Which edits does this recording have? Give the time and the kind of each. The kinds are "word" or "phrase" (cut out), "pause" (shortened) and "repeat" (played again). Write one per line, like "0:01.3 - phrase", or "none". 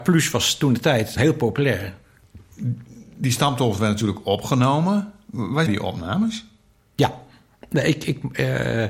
0:01.1 - word
0:05.7 - phrase
0:06.8 - pause